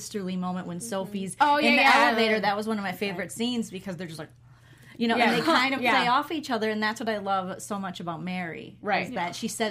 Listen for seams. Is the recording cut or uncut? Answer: uncut